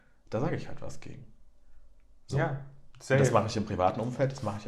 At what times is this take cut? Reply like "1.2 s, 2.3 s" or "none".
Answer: none